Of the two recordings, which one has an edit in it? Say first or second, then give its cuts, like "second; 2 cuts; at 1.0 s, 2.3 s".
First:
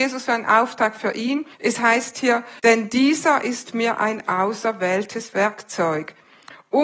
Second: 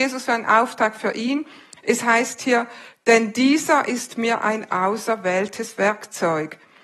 first; 2 cuts; at 1.5 s, 2.6 s